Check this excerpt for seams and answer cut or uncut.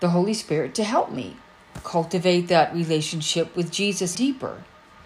cut